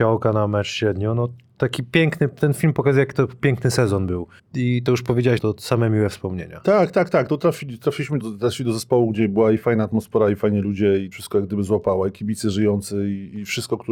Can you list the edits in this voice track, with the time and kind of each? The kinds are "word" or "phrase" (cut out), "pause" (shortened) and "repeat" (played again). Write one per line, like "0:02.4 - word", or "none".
0:04.4 - pause
0:05.4 - phrase
0:08.2 - word
0:11.1 - phrase